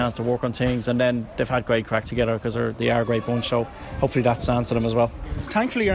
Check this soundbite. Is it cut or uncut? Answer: uncut